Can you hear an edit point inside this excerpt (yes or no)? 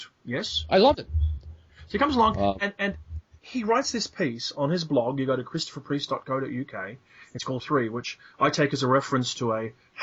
yes